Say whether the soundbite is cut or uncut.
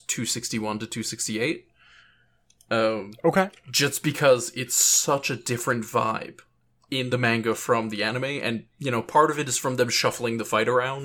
uncut